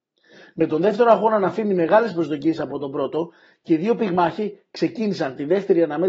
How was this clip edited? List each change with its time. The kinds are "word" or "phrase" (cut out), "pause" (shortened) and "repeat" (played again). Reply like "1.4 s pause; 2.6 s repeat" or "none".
none